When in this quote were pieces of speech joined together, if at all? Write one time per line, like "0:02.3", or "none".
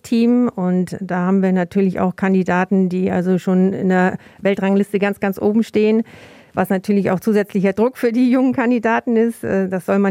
none